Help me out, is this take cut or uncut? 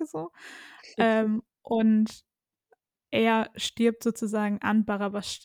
uncut